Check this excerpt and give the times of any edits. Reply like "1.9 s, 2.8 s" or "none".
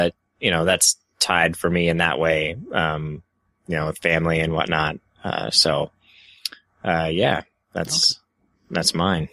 none

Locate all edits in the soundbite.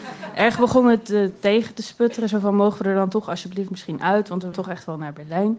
4.5 s

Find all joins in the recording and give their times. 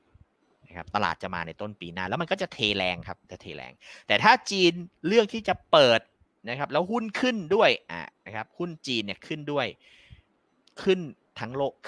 3.2 s

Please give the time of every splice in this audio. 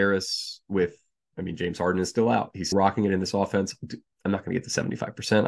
2.7 s

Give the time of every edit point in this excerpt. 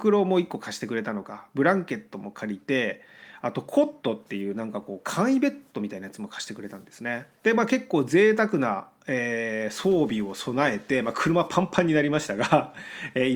7.4 s

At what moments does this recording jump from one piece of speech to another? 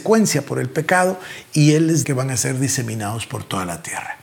2.0 s

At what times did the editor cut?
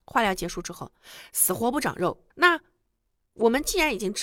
2.3 s

